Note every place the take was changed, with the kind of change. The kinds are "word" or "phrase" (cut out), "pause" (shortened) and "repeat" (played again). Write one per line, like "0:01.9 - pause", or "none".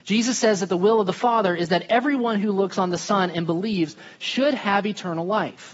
none